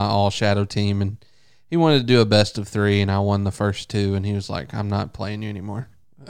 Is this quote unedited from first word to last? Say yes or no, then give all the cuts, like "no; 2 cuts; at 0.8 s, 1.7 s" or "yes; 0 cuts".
yes; 0 cuts